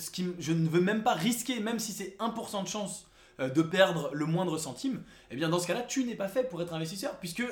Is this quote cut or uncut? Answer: uncut